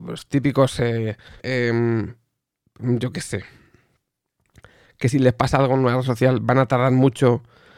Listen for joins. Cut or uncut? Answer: cut